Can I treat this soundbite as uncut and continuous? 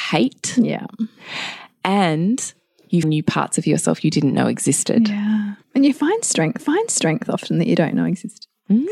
no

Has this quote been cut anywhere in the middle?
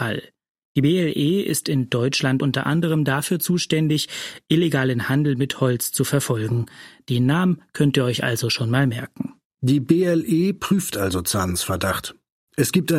no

